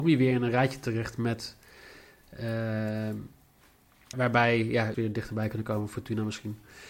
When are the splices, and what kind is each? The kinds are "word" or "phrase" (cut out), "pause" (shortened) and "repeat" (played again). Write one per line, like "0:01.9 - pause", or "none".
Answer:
0:04.1 - word
0:04.9 - phrase